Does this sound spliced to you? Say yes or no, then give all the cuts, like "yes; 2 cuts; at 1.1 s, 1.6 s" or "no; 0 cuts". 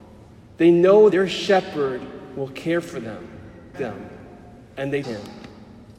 yes; 3 cuts; at 1.1 s, 3.7 s, 5.0 s